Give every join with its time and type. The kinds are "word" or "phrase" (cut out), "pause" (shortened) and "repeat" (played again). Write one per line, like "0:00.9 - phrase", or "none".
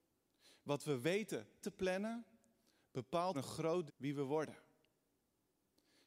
0:01.6 - word
0:03.3 - word
0:03.9 - word